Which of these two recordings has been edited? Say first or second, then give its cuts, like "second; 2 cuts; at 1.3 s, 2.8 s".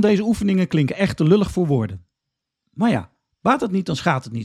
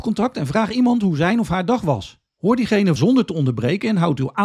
second; 2 cuts; at 2.3 s, 3.0 s